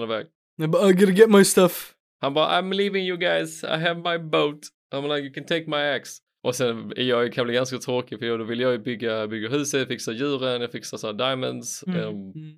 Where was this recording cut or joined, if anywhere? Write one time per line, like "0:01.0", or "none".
none